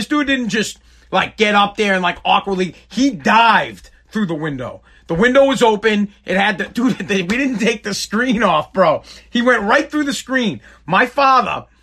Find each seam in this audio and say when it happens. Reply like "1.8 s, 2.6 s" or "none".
none